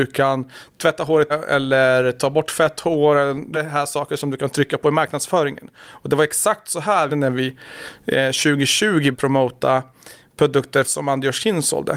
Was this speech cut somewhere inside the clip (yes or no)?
yes